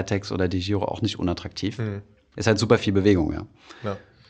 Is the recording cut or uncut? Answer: uncut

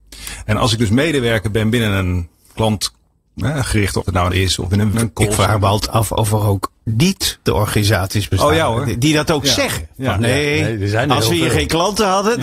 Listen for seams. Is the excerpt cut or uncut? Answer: cut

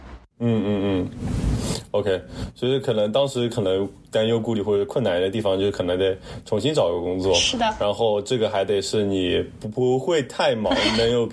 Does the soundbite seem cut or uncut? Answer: uncut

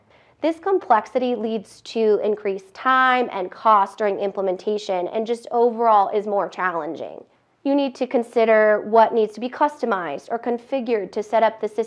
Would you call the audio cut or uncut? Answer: uncut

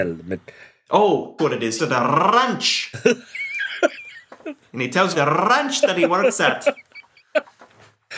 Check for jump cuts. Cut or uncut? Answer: cut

